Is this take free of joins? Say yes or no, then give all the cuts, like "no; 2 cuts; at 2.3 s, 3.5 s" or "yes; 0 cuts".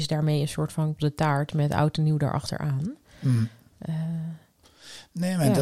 no; 1 cut; at 1.0 s